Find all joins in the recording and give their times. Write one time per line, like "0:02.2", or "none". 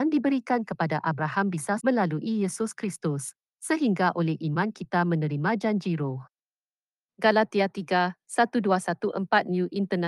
0:01.8